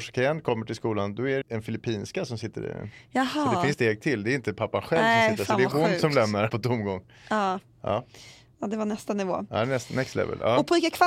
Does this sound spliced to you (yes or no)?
yes